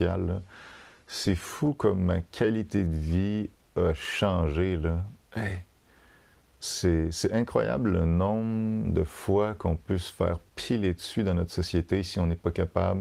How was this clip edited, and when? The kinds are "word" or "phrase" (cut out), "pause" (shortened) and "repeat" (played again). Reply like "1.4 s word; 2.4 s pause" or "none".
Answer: none